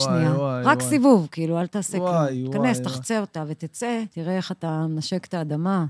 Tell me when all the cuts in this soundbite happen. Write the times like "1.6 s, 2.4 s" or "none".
4.1 s